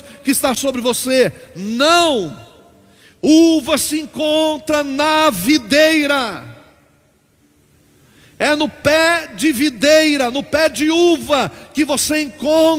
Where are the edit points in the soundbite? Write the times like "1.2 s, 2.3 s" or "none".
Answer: none